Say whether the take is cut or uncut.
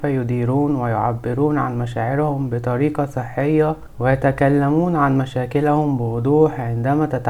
uncut